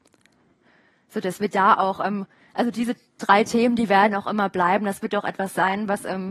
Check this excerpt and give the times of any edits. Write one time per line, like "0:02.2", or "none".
none